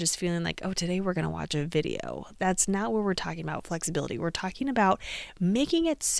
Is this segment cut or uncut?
uncut